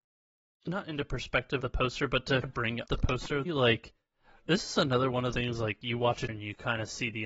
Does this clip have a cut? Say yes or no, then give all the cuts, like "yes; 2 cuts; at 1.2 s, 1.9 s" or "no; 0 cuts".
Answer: yes; 6 cuts; at 1.6 s, 2.4 s, 2.9 s, 3.5 s, 5.3 s, 6.3 s